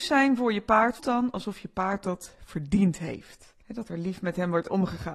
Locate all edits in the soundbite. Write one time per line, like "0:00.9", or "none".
0:01.0
0:03.6